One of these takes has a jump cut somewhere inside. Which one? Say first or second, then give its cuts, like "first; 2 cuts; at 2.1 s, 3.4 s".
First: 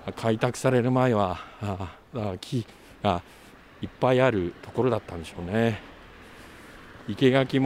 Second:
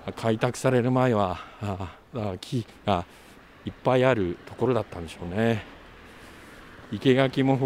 second; 1 cut; at 2.8 s